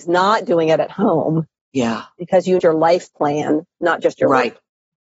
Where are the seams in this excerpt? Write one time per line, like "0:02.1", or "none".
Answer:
0:02.6